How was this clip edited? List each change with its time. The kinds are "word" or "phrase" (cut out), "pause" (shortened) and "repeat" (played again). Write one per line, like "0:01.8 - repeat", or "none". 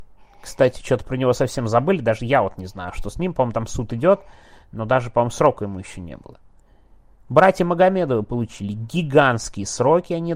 none